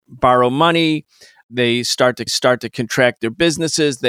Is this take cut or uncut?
cut